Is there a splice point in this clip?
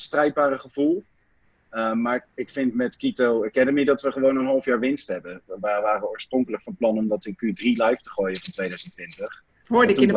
no; 0 cuts

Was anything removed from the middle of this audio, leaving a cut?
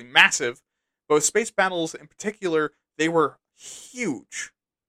no; 0 cuts

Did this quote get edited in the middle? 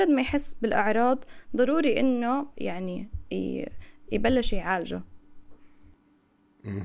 yes; 1 cut; at 2.5 s

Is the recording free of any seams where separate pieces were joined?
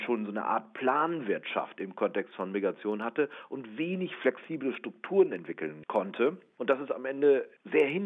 yes; 0 cuts

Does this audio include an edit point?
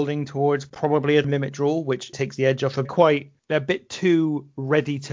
yes; 3 cuts; at 1.2 s, 2.1 s, 2.8 s

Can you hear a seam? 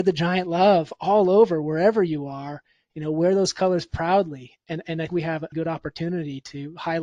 yes; 2 cuts; at 5.1 s, 5.5 s

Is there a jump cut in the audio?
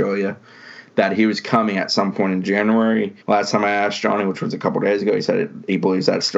yes; 1 cut; at 3.2 s

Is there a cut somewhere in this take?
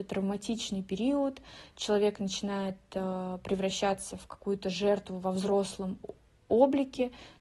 no; 0 cuts

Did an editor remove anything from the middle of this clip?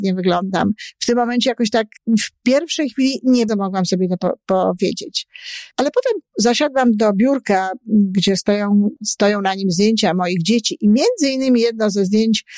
yes; 5 cuts; at 2.0 s, 3.5 s, 5.7 s, 6.3 s, 9.0 s

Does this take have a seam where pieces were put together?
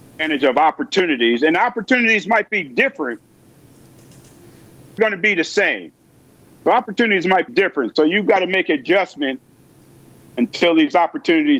yes; 2 cuts; at 5.0 s, 7.5 s

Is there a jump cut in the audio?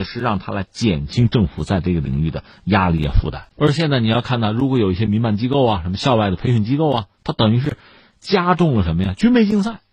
yes; 2 cuts; at 3.5 s, 7.1 s

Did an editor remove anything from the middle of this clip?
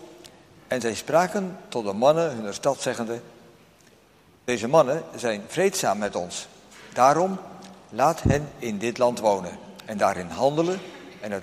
no; 0 cuts

